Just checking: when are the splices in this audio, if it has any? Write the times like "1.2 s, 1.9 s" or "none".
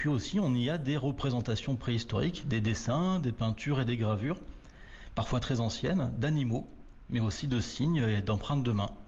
none